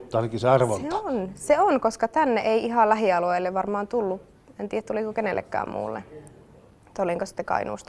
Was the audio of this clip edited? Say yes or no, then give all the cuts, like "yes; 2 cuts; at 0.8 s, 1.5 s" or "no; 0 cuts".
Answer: no; 0 cuts